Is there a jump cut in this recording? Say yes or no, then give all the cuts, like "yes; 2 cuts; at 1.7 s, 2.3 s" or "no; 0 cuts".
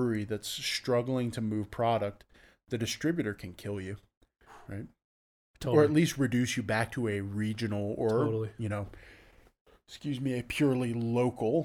no; 0 cuts